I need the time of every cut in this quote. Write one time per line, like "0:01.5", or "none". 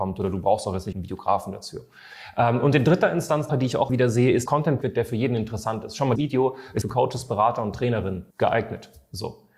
0:00.9
0:03.5
0:03.9
0:04.5
0:04.8
0:06.2
0:06.8
0:08.3